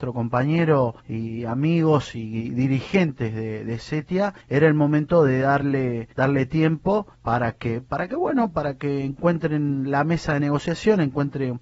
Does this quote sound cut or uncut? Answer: cut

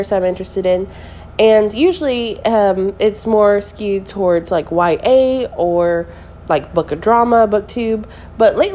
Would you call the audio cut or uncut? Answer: uncut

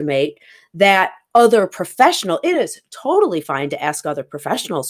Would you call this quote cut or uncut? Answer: uncut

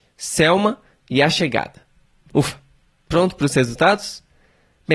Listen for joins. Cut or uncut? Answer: uncut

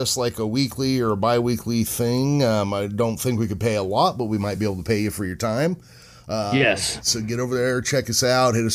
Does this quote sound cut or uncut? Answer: uncut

